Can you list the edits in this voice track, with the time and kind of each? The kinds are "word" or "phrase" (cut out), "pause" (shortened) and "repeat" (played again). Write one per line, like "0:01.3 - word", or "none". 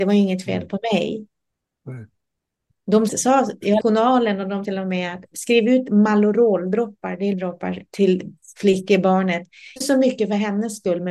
0:03.1 - word
0:03.8 - word
0:04.6 - word
0:05.3 - word
0:07.3 - word
0:07.9 - word
0:09.8 - word

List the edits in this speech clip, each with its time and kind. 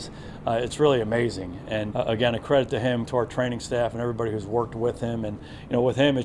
0:01.9 - word
0:03.1 - word

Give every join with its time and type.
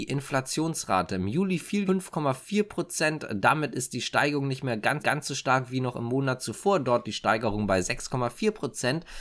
0:01.9 - phrase
0:05.0 - repeat
0:07.0 - word

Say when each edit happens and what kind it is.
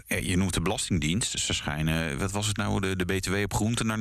none

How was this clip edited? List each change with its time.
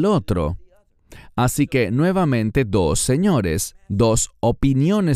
none

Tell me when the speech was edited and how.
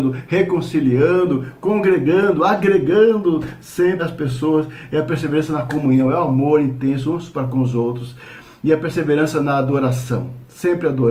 0:04.0 - word

